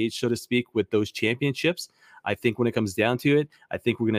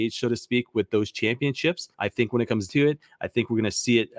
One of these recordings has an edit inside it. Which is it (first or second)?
second